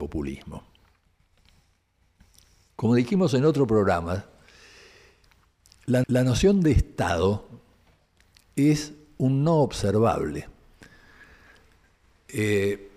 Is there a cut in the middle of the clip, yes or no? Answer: yes